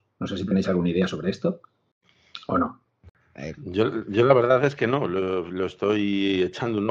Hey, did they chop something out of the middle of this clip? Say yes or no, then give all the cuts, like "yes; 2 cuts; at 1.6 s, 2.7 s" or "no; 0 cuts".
no; 0 cuts